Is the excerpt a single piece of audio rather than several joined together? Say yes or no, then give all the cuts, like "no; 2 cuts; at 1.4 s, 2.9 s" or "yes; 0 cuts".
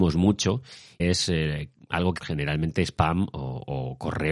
no; 2 cuts; at 1.0 s, 2.2 s